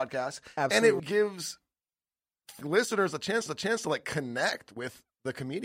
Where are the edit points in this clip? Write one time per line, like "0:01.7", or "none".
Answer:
0:01.0
0:02.6
0:03.5